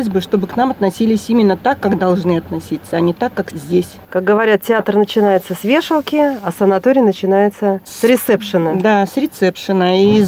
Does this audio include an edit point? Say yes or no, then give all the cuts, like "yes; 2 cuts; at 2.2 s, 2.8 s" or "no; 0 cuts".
no; 0 cuts